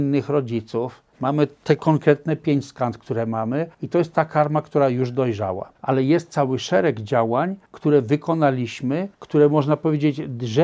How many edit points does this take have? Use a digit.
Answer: 5